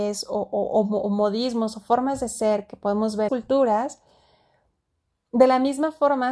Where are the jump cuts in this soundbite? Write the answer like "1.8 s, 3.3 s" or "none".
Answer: 3.3 s